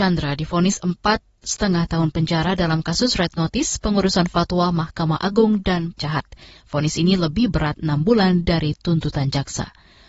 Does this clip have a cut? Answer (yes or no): yes